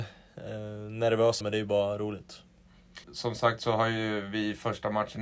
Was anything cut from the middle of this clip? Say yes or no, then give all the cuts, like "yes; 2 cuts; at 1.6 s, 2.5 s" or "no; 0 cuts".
yes; 2 cuts; at 1.4 s, 3.0 s